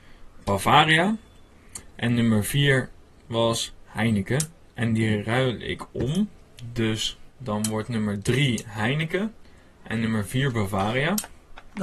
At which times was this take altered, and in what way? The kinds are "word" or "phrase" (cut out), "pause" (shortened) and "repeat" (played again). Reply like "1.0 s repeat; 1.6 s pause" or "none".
none